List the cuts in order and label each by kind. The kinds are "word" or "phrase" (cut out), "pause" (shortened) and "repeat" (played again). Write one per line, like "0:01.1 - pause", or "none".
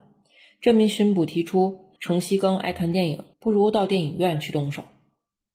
0:02.0 - pause
0:03.3 - pause